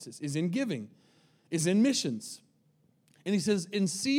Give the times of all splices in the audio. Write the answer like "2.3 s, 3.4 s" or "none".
none